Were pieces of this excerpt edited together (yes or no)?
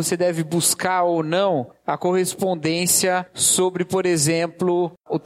no